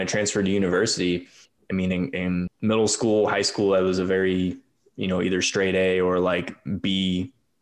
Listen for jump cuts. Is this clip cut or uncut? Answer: uncut